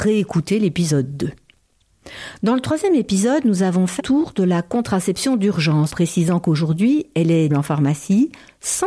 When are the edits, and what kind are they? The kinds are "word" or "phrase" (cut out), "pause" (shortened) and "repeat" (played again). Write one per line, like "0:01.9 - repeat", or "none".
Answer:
0:04.0 - word
0:05.9 - word
0:07.5 - word